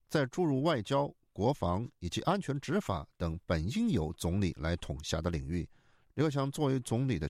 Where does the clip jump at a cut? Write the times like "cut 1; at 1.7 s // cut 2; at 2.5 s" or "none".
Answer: none